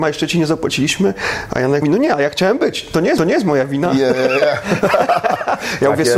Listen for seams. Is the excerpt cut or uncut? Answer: cut